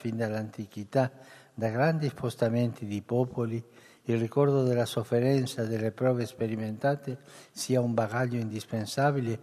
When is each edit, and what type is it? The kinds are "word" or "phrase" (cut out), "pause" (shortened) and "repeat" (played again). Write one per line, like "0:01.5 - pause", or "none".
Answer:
none